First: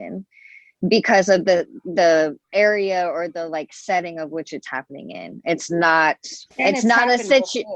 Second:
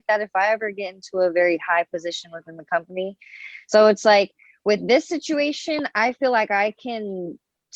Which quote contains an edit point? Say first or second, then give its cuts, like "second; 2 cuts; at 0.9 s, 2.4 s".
first; 2 cuts; at 2.4 s, 6.5 s